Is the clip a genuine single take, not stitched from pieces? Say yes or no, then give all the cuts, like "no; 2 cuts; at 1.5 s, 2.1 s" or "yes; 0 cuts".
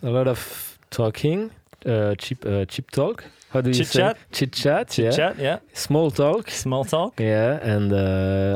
no; 1 cut; at 1.6 s